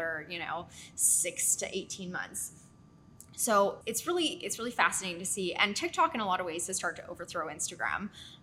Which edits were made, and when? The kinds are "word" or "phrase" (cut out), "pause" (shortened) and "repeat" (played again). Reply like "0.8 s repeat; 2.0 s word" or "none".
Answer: 3.8 s word